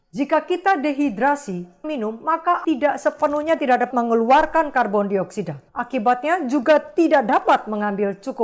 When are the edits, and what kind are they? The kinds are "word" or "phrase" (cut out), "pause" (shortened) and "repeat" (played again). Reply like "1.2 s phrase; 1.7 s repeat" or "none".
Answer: 1.8 s word; 2.6 s word; 3.6 s phrase; 3.9 s word; 5.7 s pause